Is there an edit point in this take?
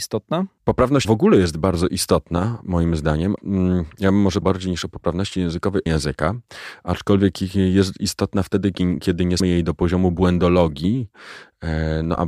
yes; 5 cuts; at 1.0 s, 3.4 s, 4.4 s, 5.9 s, 9.4 s

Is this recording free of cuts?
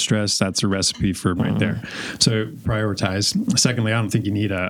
no; 2 cuts; at 1.4 s, 2.6 s

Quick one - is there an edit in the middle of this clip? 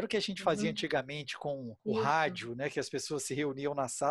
yes; 1 cut; at 1.8 s

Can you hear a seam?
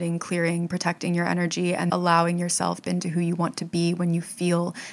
yes; 2 cuts; at 1.9 s, 2.8 s

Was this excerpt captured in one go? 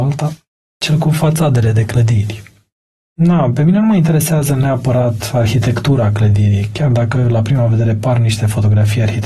yes; 0 cuts

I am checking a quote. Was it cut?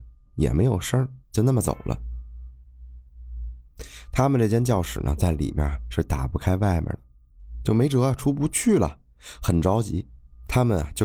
yes; 1 cut; at 1.2 s

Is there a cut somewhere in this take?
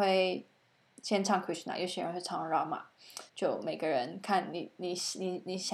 yes; 1 cut; at 3.3 s

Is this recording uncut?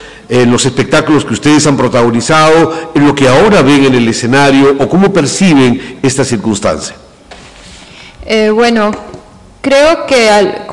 yes; 0 cuts

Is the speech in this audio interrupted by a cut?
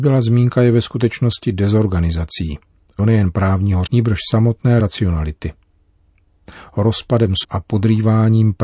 yes; 4 cuts; at 3.0 s, 3.9 s, 4.8 s, 7.4 s

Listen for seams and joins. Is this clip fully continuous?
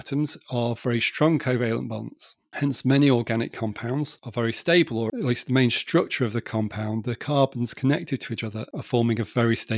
yes; 0 cuts

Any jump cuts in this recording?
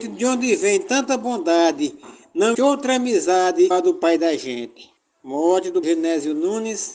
yes; 4 cuts; at 2.5 s, 3.7 s, 5.0 s, 5.8 s

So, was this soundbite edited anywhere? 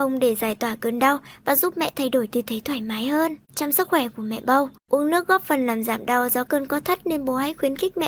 yes; 4 cuts; at 3.4 s, 3.9 s, 4.8 s, 6.5 s

